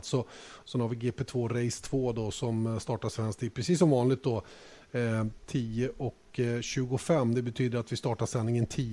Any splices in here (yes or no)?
no